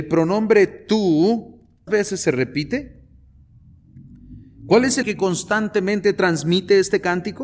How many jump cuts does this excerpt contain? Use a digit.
2